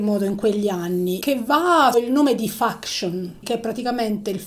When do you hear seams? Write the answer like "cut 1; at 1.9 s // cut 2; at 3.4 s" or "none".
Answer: cut 1; at 1.2 s // cut 2; at 1.9 s // cut 3; at 3.4 s

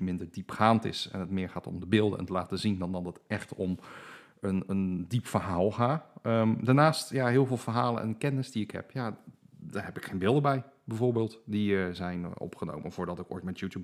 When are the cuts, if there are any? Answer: none

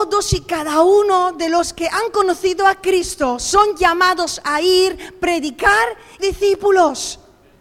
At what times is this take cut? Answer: cut 1; at 6.2 s

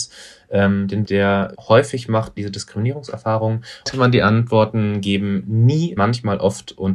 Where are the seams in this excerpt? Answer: cut 1; at 1.0 s // cut 2; at 1.5 s // cut 3; at 2.4 s // cut 4; at 3.9 s // cut 5; at 6.0 s

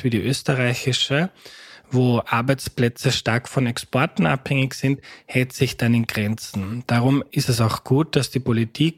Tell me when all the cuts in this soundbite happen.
none

